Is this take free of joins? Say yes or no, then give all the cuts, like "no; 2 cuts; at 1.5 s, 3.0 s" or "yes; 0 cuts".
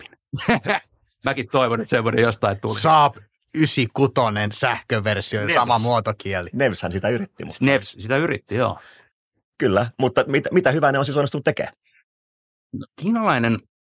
yes; 0 cuts